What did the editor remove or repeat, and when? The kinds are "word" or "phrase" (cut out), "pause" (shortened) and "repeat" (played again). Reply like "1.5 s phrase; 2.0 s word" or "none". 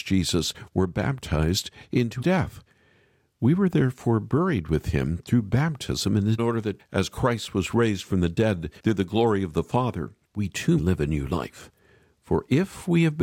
2.2 s word; 6.4 s phrase; 6.8 s word; 8.8 s pause; 10.2 s pause; 10.8 s word